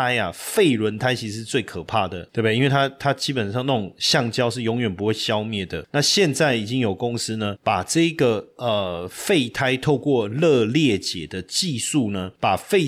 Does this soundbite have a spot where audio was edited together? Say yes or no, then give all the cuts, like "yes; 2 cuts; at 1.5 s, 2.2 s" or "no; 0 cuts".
no; 0 cuts